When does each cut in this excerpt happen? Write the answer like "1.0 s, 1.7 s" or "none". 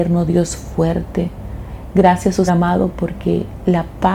2.5 s